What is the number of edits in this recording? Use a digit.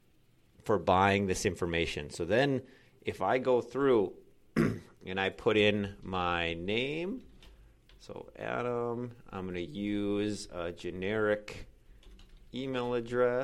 0